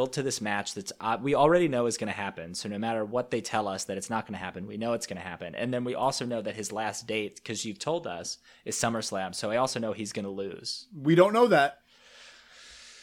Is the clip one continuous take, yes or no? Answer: yes